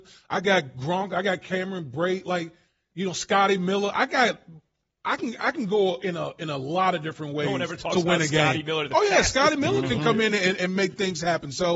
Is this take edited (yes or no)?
no